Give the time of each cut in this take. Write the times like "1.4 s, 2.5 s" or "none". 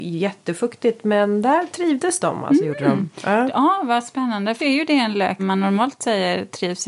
4.6 s, 5.4 s